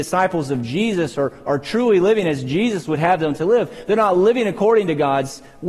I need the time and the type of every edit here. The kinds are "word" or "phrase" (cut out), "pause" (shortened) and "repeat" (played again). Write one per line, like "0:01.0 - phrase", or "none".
none

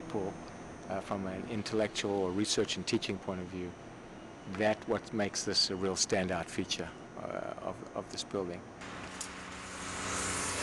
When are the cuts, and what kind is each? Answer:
none

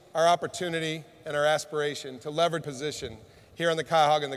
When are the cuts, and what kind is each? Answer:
0:02.6 - word

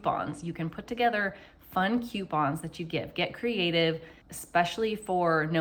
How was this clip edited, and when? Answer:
0:04.2 - pause

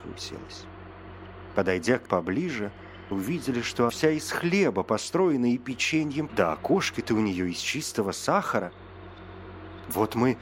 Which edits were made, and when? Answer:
0:02.0 - word
0:03.1 - word
0:03.9 - word
0:06.3 - word

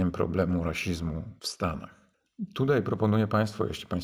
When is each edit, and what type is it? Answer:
0:01.4 - pause

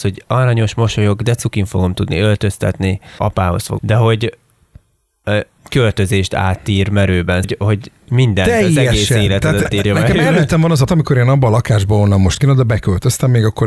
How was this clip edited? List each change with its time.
0:03.2 - word
0:03.8 - word
0:05.6 - word
0:07.4 - word
0:09.6 - word
0:10.9 - word
0:12.4 - word

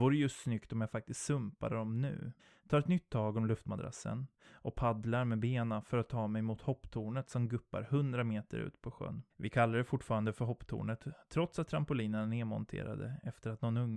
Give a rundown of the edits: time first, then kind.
0:02.4 - pause
0:09.3 - pause

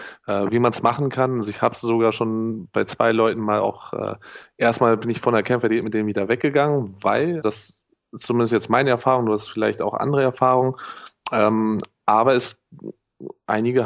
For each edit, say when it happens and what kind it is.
0:07.4 - word

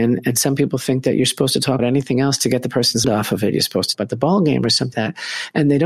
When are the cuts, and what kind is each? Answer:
0:01.8 - word
0:03.0 - word
0:03.9 - word
0:04.9 - word

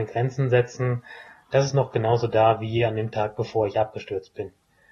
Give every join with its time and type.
none

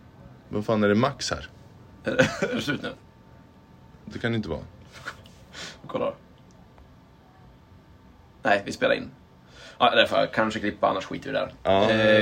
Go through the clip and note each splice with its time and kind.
none

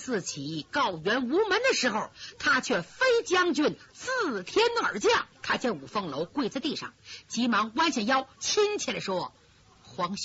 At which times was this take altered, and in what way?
0:05.3 - pause
0:08.3 - phrase

